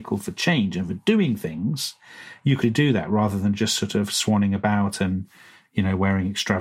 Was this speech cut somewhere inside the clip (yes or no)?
yes